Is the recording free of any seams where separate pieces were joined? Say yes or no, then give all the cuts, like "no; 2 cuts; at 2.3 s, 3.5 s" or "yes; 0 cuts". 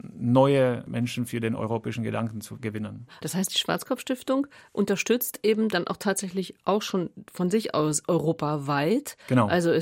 yes; 0 cuts